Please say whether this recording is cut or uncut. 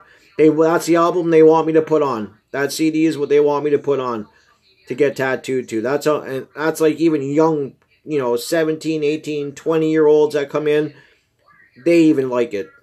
uncut